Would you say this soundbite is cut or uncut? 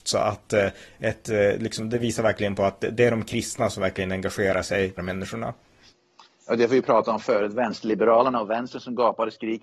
cut